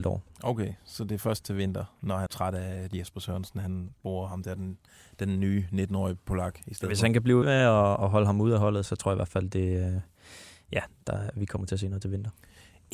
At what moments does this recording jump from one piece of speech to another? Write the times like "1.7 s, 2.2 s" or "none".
2.3 s, 7.4 s, 8.9 s